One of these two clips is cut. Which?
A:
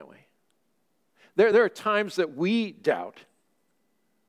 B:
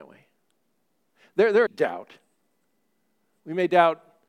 B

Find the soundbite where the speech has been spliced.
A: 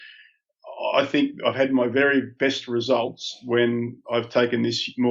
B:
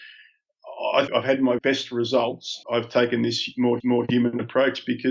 B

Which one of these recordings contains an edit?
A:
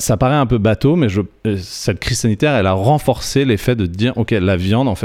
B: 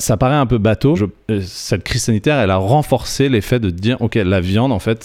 B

